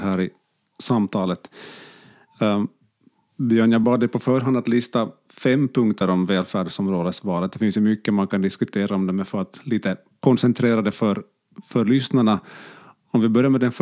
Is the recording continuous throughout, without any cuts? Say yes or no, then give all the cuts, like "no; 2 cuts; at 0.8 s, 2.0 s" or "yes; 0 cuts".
yes; 0 cuts